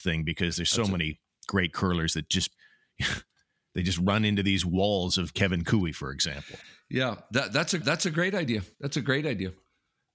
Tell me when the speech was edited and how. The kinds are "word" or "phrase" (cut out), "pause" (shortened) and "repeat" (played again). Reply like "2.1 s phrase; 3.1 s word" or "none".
2.5 s pause; 7.8 s repeat; 8.7 s pause